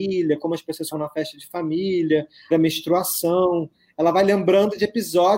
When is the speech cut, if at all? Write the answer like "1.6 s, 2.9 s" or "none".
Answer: 0.9 s, 2.5 s